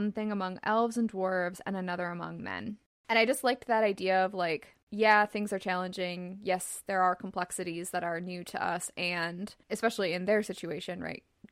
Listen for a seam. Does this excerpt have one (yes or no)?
yes